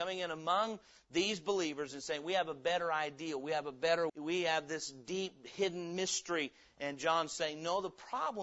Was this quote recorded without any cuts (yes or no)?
no